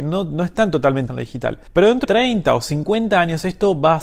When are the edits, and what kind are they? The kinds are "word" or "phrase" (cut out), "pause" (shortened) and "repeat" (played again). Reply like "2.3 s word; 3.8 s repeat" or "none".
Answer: 1.1 s word; 1.7 s pause; 2.0 s word